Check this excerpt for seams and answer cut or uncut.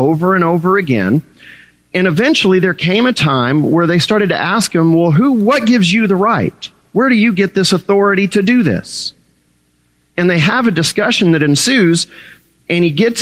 uncut